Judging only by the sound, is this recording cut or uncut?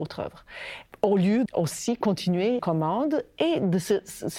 cut